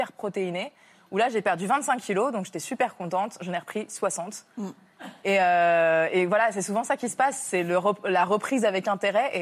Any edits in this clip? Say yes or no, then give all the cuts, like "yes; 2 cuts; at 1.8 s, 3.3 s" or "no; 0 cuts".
no; 0 cuts